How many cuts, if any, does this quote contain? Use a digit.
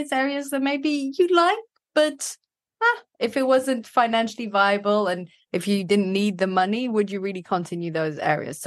0